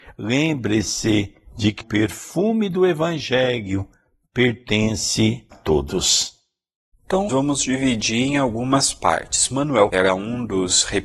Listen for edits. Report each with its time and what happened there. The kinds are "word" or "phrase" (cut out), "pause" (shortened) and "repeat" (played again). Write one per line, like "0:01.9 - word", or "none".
0:01.8 - word
0:05.5 - word
0:07.3 - word
0:09.9 - word